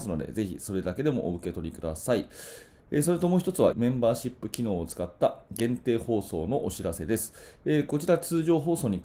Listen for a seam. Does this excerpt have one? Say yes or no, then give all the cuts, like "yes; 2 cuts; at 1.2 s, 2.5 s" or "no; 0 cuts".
yes; 1 cut; at 3.7 s